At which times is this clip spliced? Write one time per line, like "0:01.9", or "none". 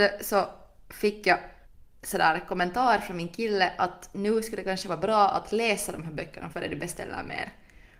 0:01.6
0:06.5